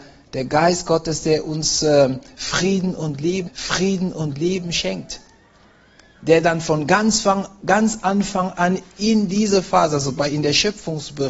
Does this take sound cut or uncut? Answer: cut